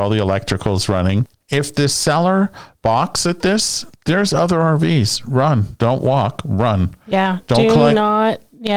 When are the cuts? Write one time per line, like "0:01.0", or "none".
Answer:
0:03.9